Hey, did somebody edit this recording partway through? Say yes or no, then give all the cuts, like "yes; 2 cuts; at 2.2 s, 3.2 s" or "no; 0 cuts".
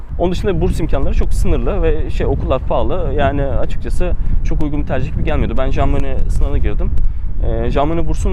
no; 0 cuts